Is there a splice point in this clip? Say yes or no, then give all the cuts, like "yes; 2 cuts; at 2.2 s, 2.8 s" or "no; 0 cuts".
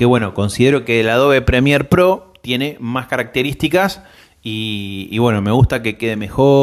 no; 0 cuts